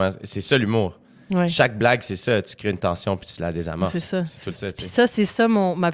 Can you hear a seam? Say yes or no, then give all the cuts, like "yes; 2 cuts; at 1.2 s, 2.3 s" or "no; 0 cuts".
yes; 1 cut; at 4.5 s